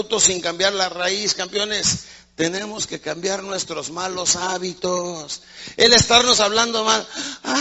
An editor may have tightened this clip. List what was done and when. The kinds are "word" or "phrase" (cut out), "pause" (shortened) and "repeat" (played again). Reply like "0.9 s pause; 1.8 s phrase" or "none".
none